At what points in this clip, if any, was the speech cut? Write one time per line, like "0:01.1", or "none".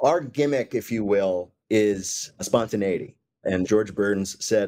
0:01.6
0:03.6